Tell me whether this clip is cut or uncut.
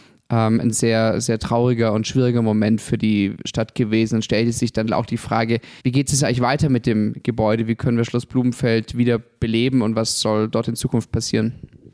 cut